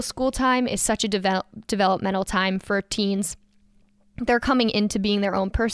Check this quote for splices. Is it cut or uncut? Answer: uncut